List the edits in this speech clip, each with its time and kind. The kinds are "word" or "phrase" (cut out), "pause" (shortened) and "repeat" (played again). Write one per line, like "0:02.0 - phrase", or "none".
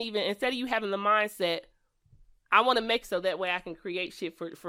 0:03.0 - phrase